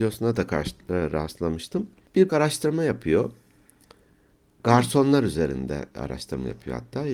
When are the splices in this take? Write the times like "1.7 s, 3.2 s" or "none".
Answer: 2.3 s